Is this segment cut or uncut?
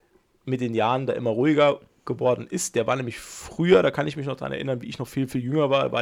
uncut